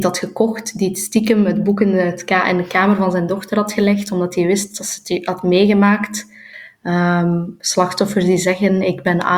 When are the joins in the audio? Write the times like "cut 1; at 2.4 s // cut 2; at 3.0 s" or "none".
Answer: none